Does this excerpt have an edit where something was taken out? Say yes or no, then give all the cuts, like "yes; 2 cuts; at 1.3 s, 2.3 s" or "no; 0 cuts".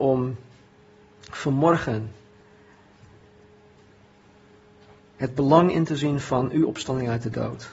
no; 0 cuts